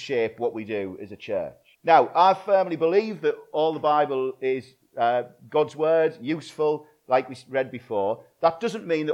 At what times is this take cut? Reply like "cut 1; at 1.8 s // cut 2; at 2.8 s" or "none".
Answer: cut 1; at 1.7 s